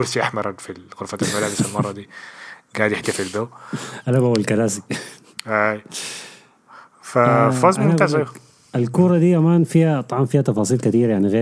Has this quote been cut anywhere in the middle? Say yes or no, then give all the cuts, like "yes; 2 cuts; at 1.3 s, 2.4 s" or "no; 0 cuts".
no; 0 cuts